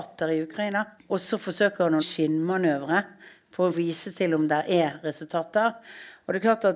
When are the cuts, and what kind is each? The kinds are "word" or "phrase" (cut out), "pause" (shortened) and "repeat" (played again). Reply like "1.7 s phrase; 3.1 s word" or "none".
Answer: 1.0 s pause; 2.0 s phrase; 3.7 s word

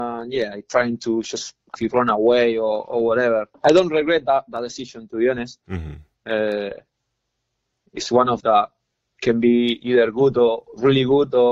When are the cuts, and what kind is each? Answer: 1.8 s phrase; 3.5 s pause; 8.4 s word

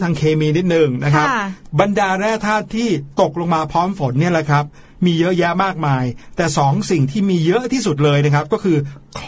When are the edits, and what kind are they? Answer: none

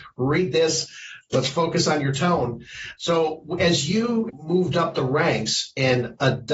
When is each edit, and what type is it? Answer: none

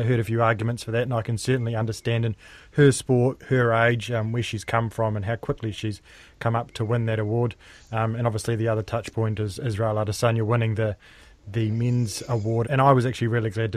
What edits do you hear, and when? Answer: 12.6 s word

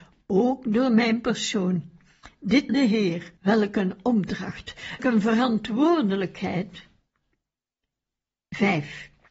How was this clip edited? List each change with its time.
2.7 s word; 3.4 s pause; 5.0 s word

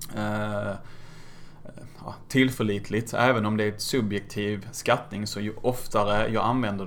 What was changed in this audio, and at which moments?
none

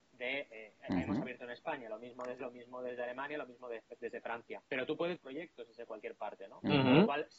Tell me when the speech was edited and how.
2.4 s word; 4.6 s pause; 5.2 s phrase

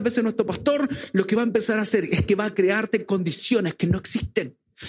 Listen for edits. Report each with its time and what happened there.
none

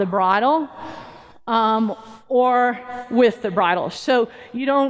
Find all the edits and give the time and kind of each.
none

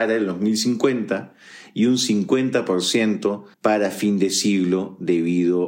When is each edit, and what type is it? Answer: 3.5 s pause

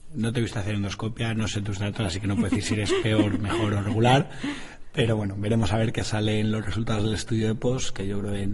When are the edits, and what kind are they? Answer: none

